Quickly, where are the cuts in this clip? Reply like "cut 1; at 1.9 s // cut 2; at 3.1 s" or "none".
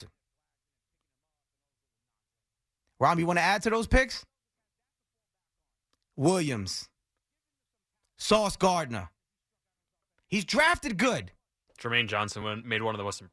none

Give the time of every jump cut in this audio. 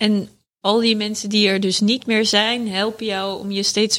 none

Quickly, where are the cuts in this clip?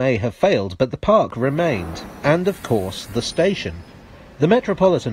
none

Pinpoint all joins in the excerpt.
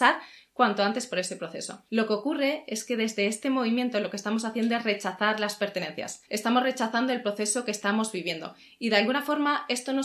cut 1; at 1.9 s // cut 2; at 6.3 s

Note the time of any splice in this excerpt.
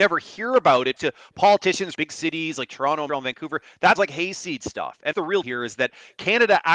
cut 1; at 1.0 s // cut 2; at 1.9 s // cut 3; at 3.1 s // cut 4; at 4.0 s // cut 5; at 5.1 s // cut 6; at 5.4 s

